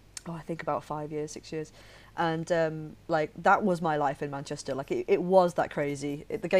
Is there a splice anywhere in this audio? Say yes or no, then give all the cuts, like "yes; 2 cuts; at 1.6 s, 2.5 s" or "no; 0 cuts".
no; 0 cuts